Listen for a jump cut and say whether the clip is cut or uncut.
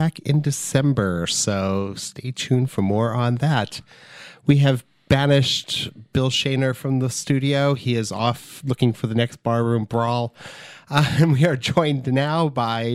uncut